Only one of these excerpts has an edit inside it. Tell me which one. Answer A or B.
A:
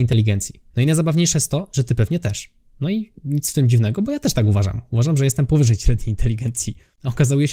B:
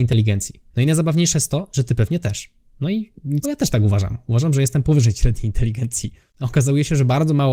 B